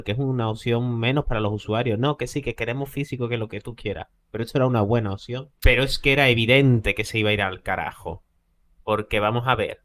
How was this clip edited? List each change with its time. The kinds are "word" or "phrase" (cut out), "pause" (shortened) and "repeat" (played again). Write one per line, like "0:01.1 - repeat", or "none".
0:05.6 - pause